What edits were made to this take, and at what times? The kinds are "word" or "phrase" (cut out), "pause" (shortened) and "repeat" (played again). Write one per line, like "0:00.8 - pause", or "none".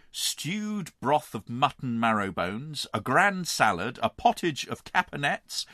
none